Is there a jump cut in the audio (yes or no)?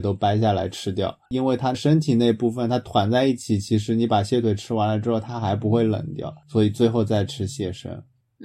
yes